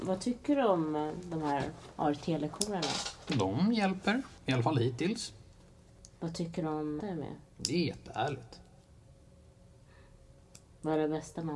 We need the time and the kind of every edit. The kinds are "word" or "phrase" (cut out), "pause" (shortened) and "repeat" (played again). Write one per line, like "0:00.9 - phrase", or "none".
0:04.4 - pause
0:07.0 - phrase
0:07.5 - pause